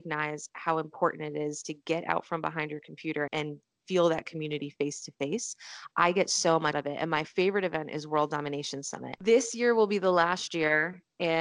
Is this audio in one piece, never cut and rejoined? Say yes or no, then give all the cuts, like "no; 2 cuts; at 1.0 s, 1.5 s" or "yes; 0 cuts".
no; 2 cuts; at 3.3 s, 6.7 s